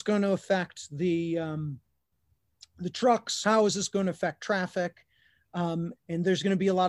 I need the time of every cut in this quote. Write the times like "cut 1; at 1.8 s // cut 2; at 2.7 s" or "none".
cut 1; at 5.9 s